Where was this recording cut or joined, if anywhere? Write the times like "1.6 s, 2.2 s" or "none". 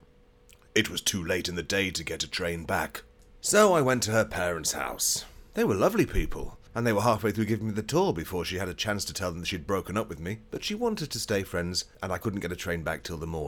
3.2 s, 6.7 s, 11.9 s